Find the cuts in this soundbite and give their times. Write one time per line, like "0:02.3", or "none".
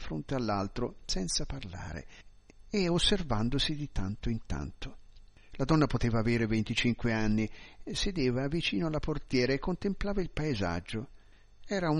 none